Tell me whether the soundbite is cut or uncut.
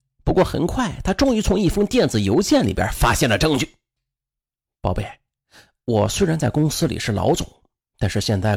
uncut